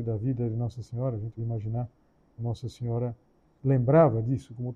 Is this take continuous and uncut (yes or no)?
no